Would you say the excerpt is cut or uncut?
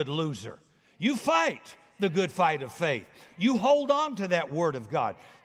uncut